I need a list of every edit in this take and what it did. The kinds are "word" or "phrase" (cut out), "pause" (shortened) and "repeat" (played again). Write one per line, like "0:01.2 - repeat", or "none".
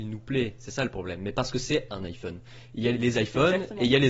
0:02.9 - word

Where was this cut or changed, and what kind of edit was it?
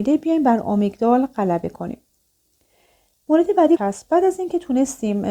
0:03.8 - word

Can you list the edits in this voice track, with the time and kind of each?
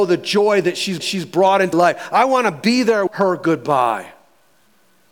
0:01.0 - repeat
0:01.7 - word
0:03.1 - phrase

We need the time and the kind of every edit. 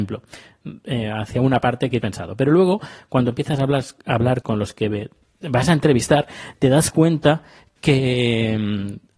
0:02.0 - word
0:04.4 - word

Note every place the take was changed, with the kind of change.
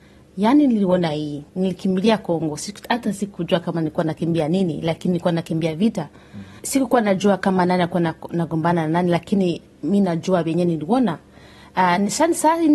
0:01.5 - pause

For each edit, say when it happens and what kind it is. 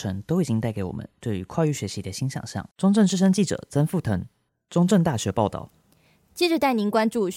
0:02.7 - pause

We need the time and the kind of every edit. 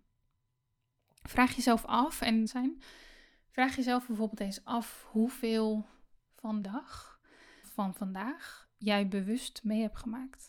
0:02.5 - phrase
0:06.6 - word
0:07.6 - word

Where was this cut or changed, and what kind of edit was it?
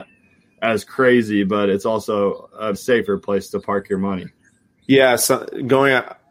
0:02.7 - word

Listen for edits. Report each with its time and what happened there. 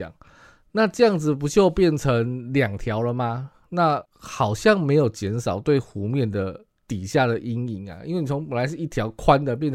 0:04.1 - pause

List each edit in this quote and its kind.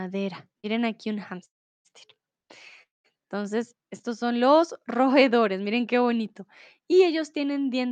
none

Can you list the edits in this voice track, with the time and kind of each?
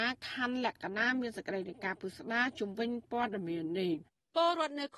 0:04.1 - pause

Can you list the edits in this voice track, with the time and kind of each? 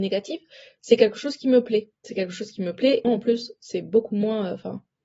0:02.0 - pause
0:03.0 - word

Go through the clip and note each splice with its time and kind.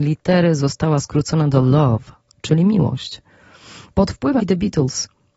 0:04.4 - word

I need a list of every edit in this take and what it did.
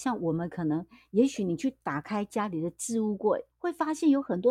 0:03.5 - pause

